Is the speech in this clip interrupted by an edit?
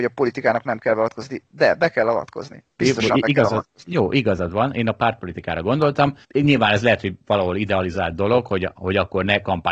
yes; 2 cuts; at 2.7 s, 6.2 s

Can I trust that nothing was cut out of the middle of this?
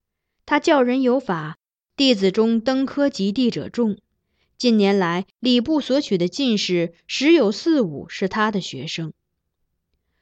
yes; 0 cuts

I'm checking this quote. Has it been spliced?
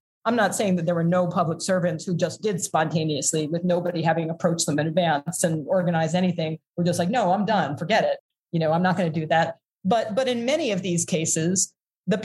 no; 0 cuts

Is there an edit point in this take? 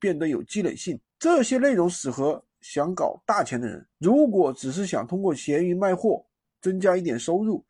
yes; 2 cuts; at 1.1 s, 3.9 s

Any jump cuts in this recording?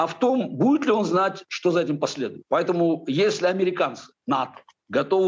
no; 0 cuts

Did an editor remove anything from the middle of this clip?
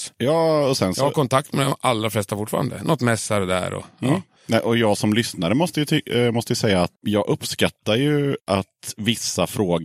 yes; 1 cut; at 6.9 s

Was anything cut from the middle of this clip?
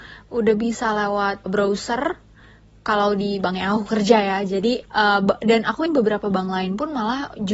yes; 3 cuts; at 1.5 s, 4.9 s, 5.9 s

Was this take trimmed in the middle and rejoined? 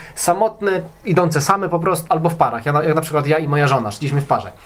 yes; 1 cut; at 2.1 s

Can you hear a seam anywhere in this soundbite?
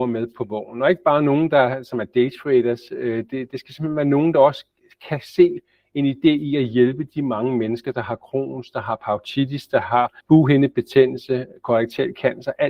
yes; 1 cut; at 10.2 s

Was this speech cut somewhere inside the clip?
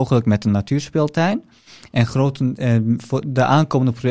no; 0 cuts

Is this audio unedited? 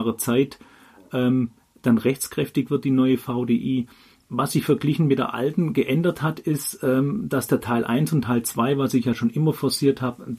yes; 0 cuts

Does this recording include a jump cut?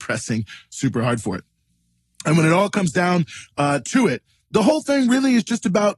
no; 0 cuts

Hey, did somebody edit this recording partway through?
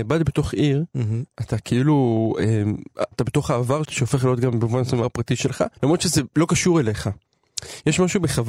yes; 4 cuts; at 3.1 s, 3.8 s, 5.0 s, 5.8 s

